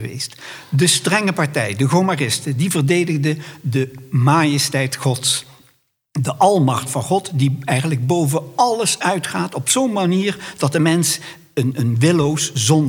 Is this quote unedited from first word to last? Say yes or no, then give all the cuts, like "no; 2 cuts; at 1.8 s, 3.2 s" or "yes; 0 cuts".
yes; 0 cuts